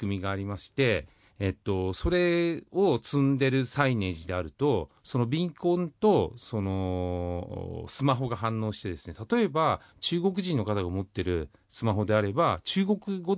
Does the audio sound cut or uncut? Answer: uncut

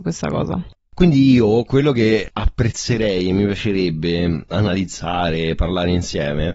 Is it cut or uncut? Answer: uncut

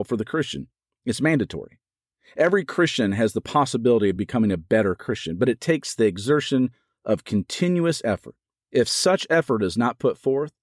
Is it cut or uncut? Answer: uncut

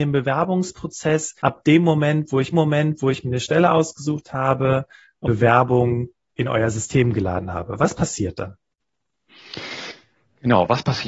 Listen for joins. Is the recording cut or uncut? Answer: cut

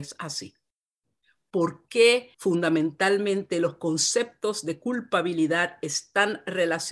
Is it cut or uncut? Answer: cut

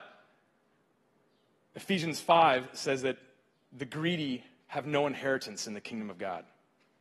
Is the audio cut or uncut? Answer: uncut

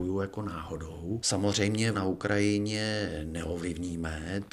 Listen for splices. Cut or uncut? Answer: cut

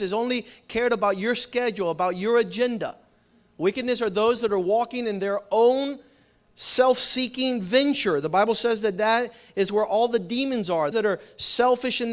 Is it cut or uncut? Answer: cut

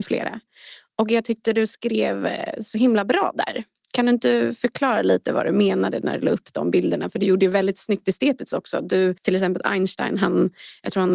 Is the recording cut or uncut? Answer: uncut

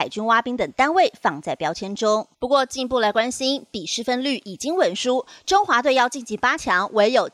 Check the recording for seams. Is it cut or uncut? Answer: cut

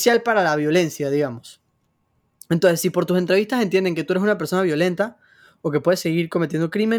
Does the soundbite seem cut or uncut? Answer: uncut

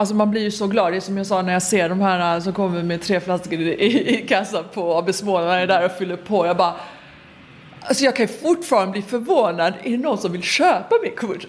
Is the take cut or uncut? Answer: uncut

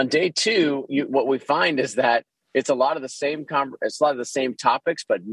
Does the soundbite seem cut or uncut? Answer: uncut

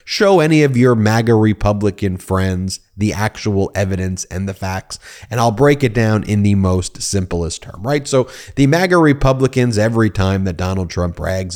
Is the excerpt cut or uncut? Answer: uncut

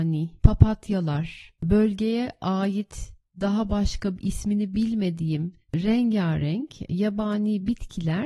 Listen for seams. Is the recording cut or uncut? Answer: uncut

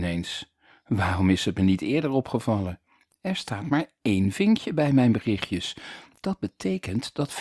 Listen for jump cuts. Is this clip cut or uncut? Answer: uncut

